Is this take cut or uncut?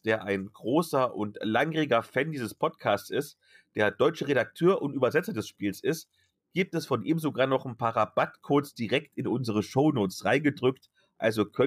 uncut